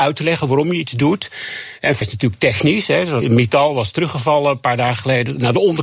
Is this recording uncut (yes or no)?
no